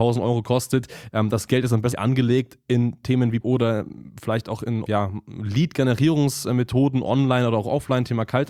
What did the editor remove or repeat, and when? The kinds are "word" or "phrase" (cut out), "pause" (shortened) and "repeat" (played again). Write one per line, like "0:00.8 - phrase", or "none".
0:01.9 - word
0:03.4 - word
0:04.8 - word